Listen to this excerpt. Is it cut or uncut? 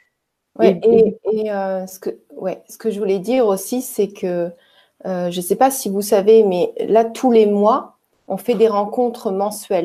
uncut